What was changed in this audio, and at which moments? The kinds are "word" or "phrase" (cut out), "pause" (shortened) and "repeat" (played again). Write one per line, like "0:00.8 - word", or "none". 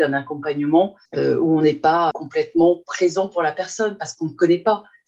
0:01.1 - pause
0:02.1 - word